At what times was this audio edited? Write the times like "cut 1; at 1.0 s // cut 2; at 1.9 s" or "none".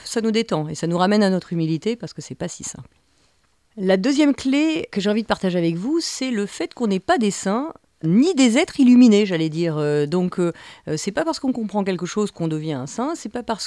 none